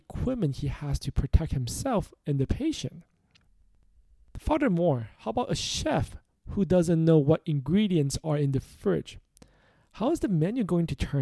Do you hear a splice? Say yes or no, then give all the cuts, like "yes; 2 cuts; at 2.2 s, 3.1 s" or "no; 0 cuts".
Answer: no; 0 cuts